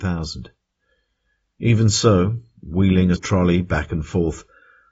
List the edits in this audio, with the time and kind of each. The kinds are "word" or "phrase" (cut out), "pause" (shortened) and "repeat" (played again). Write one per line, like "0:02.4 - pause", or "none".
0:03.2 - word